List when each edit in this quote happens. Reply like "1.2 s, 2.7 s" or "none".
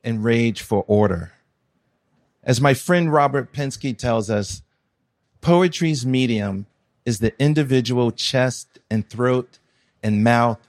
none